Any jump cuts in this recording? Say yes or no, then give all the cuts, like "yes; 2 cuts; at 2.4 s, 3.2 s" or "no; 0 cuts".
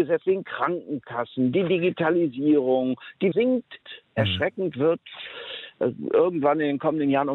yes; 2 cuts; at 3.3 s, 3.8 s